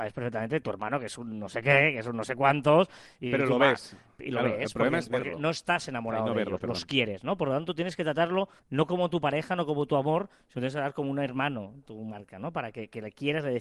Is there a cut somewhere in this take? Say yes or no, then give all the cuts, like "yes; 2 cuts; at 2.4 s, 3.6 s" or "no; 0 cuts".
yes; 1 cut; at 8.6 s